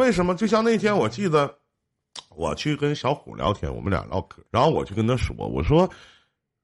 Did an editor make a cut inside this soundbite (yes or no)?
yes